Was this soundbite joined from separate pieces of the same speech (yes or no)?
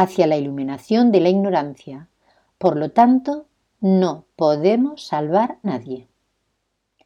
yes